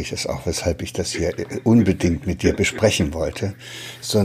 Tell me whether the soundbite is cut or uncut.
uncut